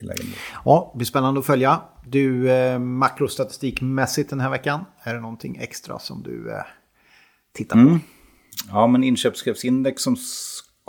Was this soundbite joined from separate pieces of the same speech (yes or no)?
no